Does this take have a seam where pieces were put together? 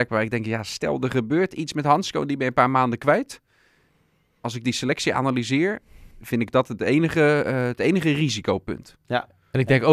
yes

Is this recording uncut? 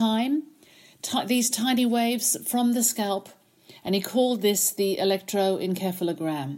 yes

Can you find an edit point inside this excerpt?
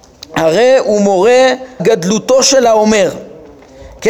yes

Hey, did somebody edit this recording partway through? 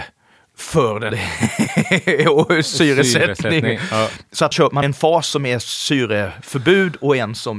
yes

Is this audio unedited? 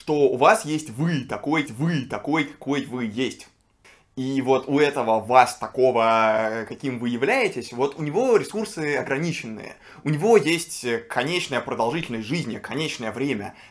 no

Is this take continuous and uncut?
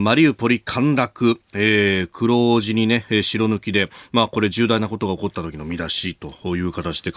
yes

